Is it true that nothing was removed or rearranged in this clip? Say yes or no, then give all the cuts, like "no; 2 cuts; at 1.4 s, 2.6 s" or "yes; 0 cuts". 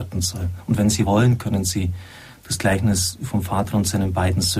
yes; 0 cuts